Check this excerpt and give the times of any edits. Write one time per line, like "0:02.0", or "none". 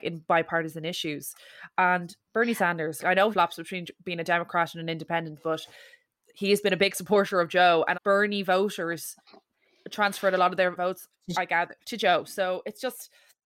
0:02.3
0:03.0
0:03.3
0:07.9
0:11.3
0:11.8